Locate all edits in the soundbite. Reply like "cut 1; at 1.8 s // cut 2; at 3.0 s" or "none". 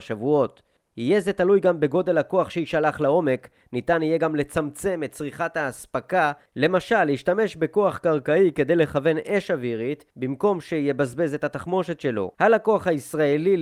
cut 1; at 10.1 s // cut 2; at 12.3 s

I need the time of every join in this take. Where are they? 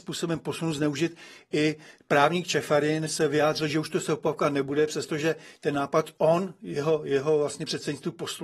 none

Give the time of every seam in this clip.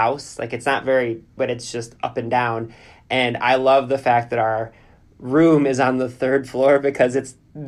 cut 1; at 1.4 s

